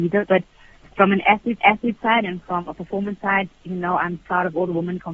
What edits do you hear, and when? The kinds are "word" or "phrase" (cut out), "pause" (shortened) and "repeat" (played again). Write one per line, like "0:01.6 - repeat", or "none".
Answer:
0:01.6 - repeat
0:04.2 - word